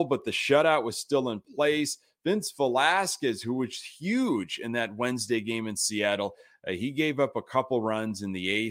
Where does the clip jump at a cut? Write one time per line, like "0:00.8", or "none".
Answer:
none